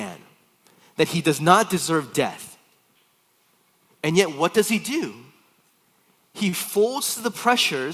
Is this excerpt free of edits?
yes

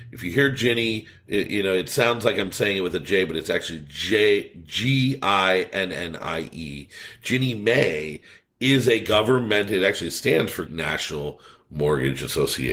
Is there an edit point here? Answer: yes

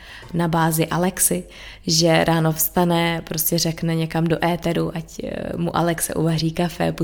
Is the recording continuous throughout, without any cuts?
yes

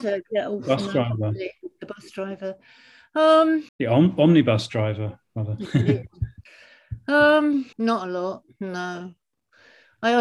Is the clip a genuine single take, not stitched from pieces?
no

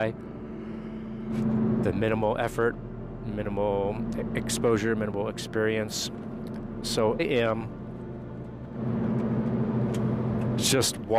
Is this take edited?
yes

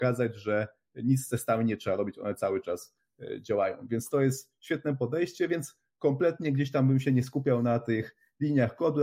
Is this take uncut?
yes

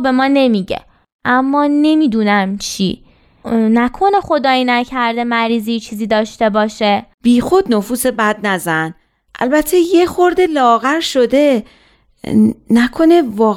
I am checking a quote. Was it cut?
no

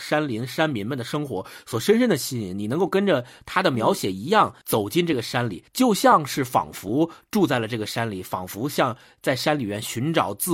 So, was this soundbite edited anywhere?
yes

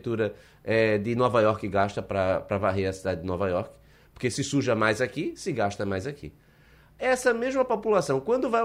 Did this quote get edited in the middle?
no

